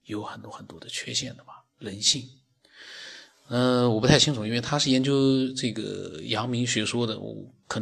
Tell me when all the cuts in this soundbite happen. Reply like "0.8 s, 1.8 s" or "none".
none